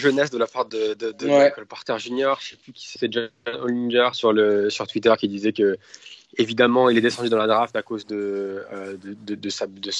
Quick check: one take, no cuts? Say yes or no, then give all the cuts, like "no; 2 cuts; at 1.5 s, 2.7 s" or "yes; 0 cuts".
no; 2 cuts; at 3.0 s, 3.4 s